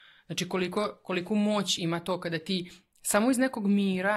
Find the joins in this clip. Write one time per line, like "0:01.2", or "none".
none